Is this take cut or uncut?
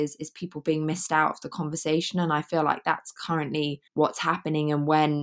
cut